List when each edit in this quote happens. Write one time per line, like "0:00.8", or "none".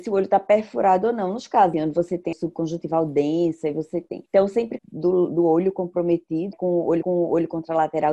0:01.7
0:02.3
0:04.3
0:04.8
0:06.5
0:07.0